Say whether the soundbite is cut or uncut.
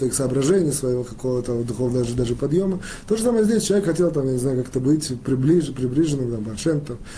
uncut